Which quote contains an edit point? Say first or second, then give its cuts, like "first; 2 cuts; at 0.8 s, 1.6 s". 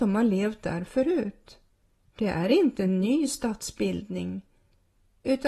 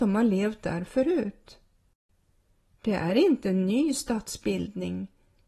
first; 1 cut; at 1.7 s